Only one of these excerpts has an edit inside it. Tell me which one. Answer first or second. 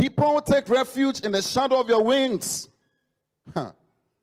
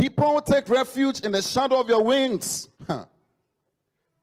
second